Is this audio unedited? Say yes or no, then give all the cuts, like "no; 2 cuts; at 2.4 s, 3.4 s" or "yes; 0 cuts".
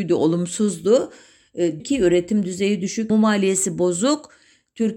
no; 2 cuts; at 1.8 s, 3.1 s